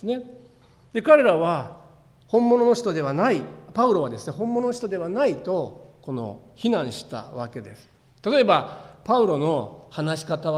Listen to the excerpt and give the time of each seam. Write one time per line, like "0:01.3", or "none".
none